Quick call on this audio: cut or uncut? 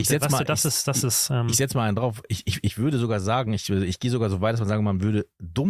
uncut